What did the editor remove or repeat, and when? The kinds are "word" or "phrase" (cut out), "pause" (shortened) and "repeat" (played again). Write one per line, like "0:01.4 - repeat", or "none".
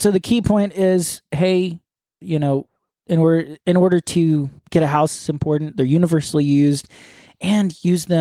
0:02.2 - word
0:03.0 - word
0:04.6 - pause